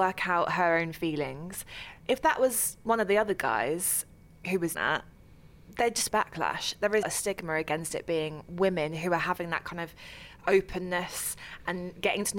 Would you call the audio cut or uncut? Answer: cut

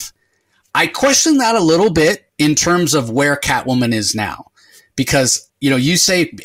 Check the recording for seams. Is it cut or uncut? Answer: cut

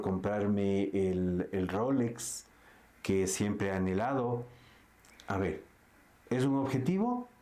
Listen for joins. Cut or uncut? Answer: uncut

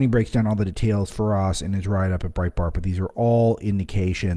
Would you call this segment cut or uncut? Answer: uncut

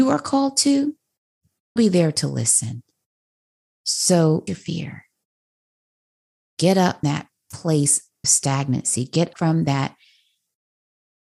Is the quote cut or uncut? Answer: cut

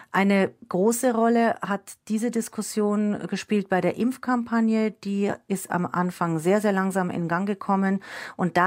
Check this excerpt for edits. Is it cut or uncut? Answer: uncut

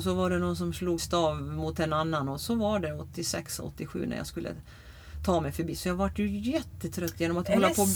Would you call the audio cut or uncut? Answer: cut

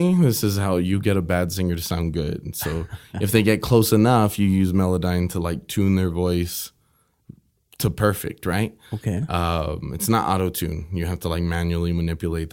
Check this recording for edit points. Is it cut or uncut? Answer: uncut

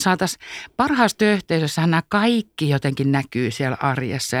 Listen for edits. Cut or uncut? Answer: uncut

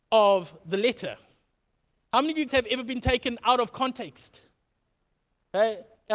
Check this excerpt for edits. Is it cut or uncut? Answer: cut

